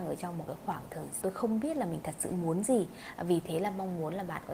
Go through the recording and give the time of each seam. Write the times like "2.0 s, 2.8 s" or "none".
1.2 s